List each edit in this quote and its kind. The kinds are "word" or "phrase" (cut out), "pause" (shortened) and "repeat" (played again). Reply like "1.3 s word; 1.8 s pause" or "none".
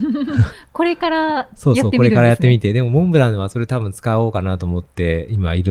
none